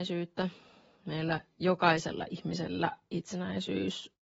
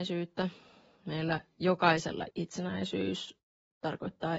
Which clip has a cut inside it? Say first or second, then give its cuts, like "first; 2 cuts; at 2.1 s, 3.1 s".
second; 1 cut; at 2.3 s